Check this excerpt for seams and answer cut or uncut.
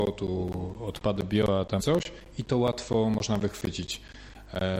cut